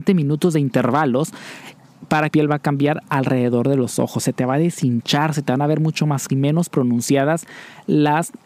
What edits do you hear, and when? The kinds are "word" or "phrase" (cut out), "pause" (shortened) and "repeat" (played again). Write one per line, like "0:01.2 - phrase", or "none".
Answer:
0:02.3 - phrase
0:06.3 - word